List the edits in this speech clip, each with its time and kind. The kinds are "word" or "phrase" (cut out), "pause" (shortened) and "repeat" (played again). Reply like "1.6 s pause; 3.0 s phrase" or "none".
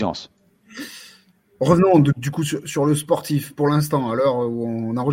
none